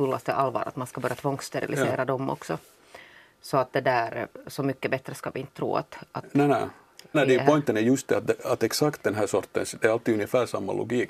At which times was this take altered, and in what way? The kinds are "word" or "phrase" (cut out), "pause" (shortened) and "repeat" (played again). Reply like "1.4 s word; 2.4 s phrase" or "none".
7.1 s word